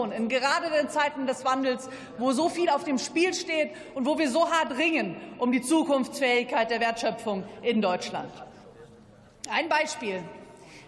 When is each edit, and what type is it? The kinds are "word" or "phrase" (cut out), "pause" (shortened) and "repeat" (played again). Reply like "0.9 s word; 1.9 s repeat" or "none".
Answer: none